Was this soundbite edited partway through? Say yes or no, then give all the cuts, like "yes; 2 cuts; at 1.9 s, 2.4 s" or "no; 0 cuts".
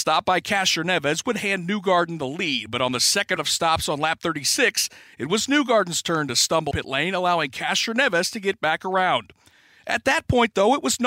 yes; 2 cuts; at 3.4 s, 6.7 s